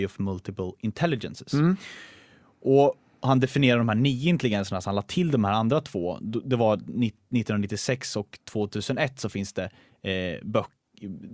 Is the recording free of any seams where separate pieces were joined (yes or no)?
yes